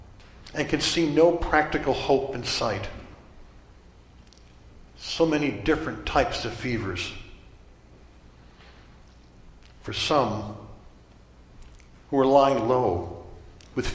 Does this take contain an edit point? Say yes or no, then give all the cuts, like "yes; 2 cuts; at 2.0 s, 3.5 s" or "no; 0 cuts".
no; 0 cuts